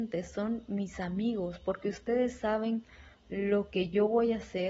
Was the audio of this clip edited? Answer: no; 0 cuts

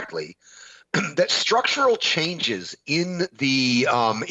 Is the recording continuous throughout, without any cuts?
yes; 0 cuts

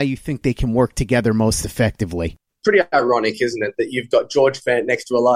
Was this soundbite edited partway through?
no; 0 cuts

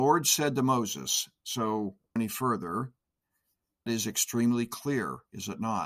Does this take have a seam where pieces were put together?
yes; 2 cuts; at 2.2 s, 3.9 s

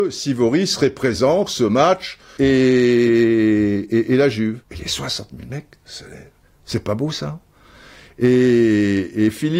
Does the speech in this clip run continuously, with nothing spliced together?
no; 4 cuts; at 1.5 s, 2.4 s, 4.6 s, 6.6 s

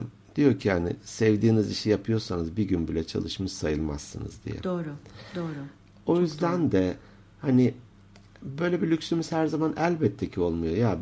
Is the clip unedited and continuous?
yes; 0 cuts

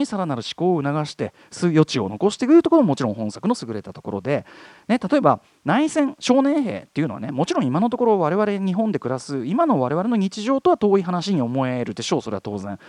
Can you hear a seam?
no; 0 cuts

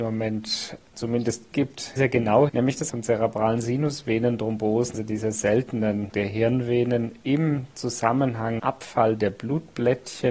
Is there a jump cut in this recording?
yes; 7 cuts; at 1.5 s, 2.0 s, 2.5 s, 2.9 s, 4.9 s, 6.1 s, 8.6 s

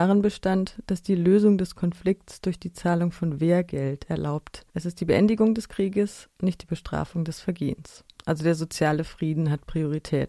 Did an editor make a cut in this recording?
yes; 1 cut; at 4.7 s

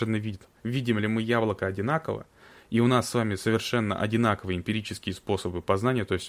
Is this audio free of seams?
yes; 0 cuts

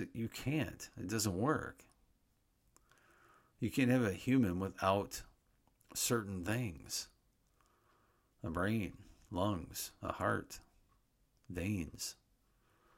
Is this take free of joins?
yes; 0 cuts

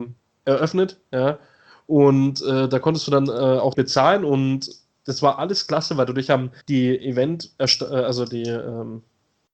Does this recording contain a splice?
yes; 2 cuts; at 3.7 s, 6.6 s

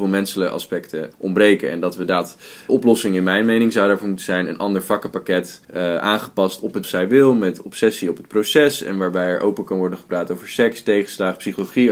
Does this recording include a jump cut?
yes; 4 cuts; at 1.1 s, 2.7 s, 5.6 s, 6.8 s

